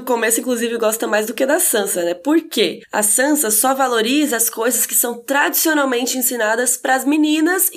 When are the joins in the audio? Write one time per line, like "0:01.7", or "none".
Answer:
none